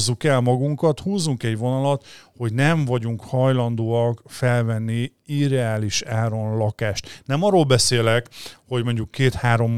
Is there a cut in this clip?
no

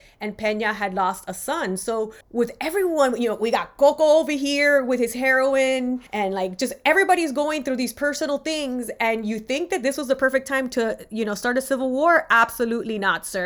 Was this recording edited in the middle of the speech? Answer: yes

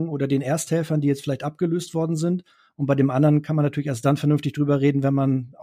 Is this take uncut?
yes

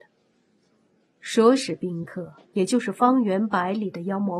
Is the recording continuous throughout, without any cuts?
no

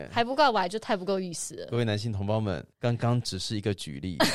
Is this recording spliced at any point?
yes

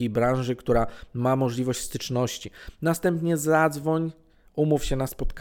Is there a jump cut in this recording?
no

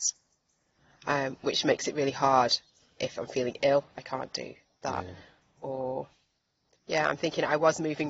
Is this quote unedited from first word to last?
yes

